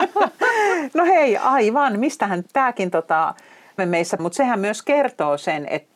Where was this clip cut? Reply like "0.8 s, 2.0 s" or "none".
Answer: 2.4 s, 3.8 s, 4.2 s